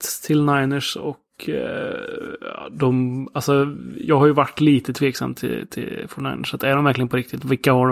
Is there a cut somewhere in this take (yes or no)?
no